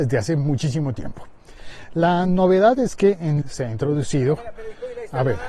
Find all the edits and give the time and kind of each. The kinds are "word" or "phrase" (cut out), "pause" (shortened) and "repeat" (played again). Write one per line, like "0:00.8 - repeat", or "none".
0:03.4 - word

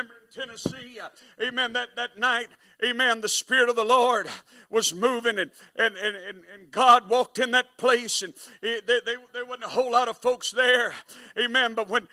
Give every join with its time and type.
none

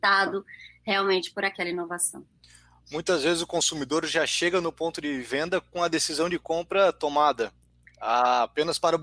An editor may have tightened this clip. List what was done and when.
none

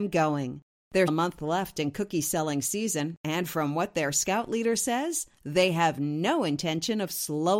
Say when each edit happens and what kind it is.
0:01.1 - word

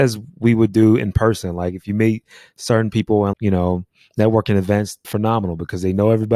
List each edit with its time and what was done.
0:03.3 - word
0:05.0 - word

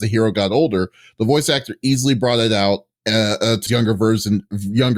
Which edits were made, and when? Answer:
0:03.7 - word

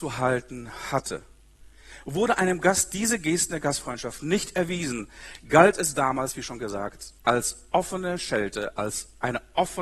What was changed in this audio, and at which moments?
none

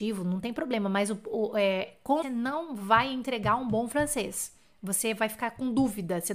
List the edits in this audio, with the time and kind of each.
0:02.2 - phrase

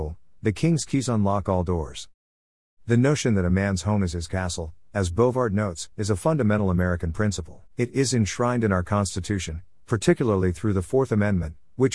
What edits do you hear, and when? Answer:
0:05.9 - pause
0:07.7 - pause

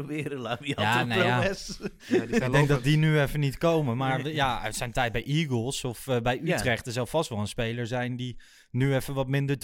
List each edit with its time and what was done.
none

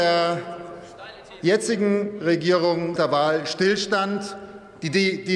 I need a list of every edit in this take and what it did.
0:03.0 - word

